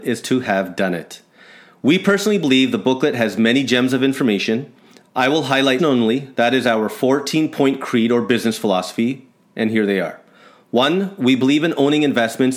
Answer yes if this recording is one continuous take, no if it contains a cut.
no